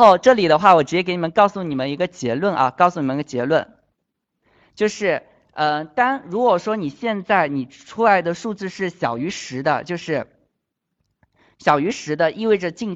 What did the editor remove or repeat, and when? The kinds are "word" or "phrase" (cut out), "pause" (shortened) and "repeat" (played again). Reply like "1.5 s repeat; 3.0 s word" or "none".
none